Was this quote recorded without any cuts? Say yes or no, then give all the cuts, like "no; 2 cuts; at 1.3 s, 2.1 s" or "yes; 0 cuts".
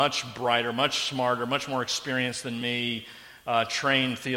yes; 0 cuts